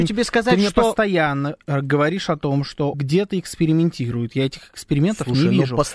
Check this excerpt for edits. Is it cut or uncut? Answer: cut